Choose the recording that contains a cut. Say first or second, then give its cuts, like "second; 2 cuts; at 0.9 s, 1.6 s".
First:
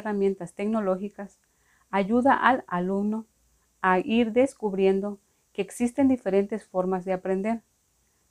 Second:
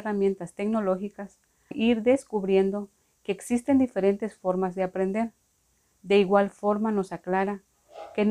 second; 1 cut; at 1.7 s